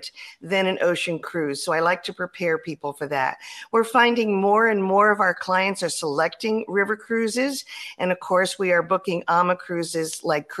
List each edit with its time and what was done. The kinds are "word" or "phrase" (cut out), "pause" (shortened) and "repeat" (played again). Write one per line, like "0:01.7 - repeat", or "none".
none

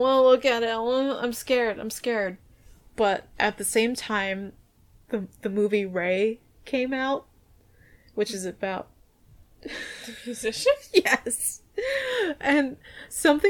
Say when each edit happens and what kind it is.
none

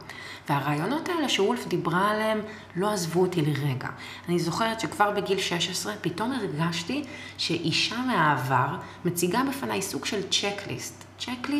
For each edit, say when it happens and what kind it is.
none

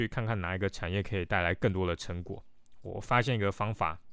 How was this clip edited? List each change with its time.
none

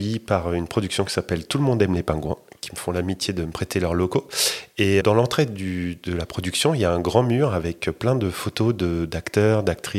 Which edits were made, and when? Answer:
0:02.6 - word
0:05.0 - word

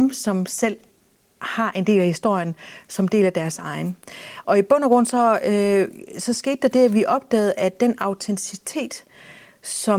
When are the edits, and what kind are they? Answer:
none

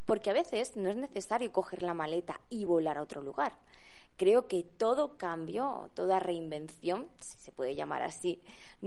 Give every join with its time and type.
none

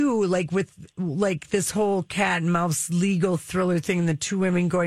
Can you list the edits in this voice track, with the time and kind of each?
none

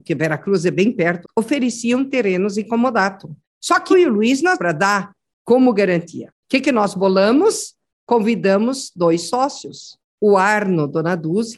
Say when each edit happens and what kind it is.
0:01.2 - word
0:03.9 - word
0:04.6 - phrase
0:06.4 - pause

